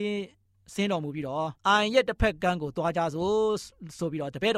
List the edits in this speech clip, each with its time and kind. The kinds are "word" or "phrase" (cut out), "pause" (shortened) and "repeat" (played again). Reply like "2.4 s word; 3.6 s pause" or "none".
1.6 s pause